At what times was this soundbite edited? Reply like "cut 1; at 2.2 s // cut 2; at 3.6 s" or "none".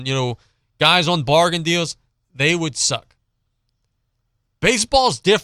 none